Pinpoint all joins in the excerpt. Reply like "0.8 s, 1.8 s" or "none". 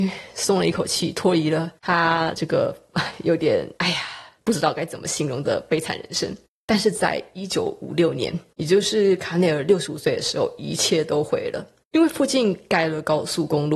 none